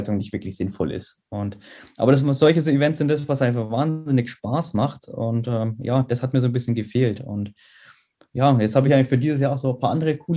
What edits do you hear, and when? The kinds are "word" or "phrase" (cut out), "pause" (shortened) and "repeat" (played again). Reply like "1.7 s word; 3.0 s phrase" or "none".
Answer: none